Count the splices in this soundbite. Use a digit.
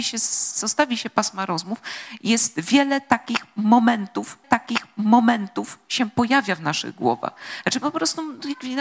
1